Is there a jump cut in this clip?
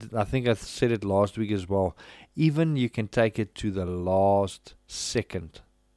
no; 0 cuts

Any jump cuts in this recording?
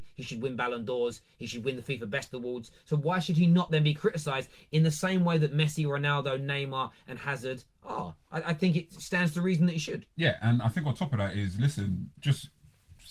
no; 0 cuts

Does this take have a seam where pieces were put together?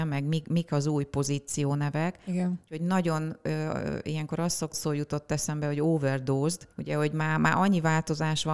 yes; 2 cuts; at 4.7 s, 6.7 s

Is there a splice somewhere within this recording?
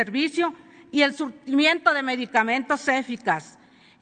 no; 0 cuts

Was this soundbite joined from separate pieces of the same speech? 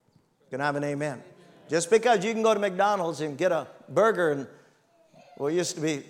no; 0 cuts

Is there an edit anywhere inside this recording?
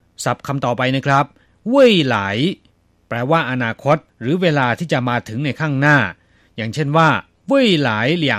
yes; 1 cut; at 4.1 s

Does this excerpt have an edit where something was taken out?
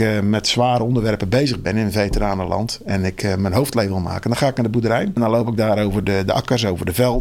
no; 0 cuts

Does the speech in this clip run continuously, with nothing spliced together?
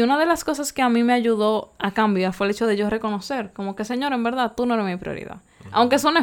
yes; 0 cuts

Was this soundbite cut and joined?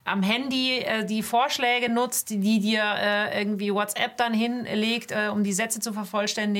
no; 0 cuts

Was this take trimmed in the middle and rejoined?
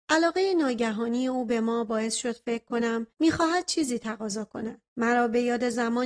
yes; 2 cuts; at 3.1 s, 4.9 s

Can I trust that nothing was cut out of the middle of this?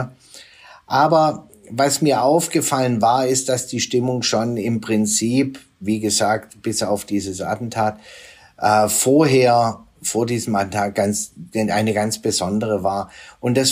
yes; 0 cuts

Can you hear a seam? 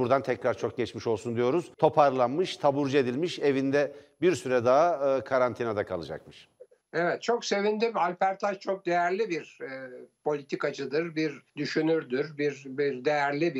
yes; 3 cuts; at 1.7 s, 6.7 s, 11.5 s

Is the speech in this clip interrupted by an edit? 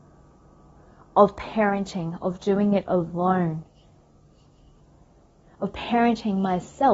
no; 0 cuts

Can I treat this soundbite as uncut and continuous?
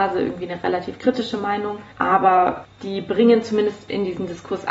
no; 1 cut; at 2.7 s

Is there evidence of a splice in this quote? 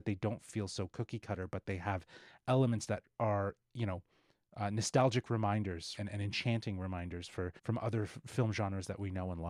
yes; 2 cuts; at 6.0 s, 7.6 s

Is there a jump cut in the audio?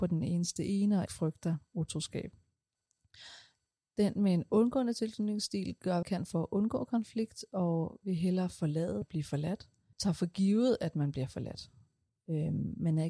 yes; 4 cuts; at 1.1 s, 6.0 s, 9.0 s, 9.9 s

